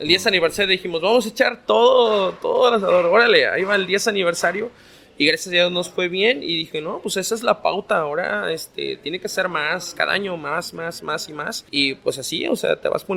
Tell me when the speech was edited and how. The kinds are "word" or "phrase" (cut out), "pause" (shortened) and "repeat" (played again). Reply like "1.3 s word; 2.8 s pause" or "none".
11.0 s word; 11.7 s pause